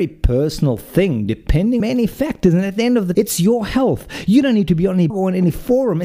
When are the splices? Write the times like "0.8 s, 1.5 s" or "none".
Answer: 1.8 s, 3.1 s, 5.1 s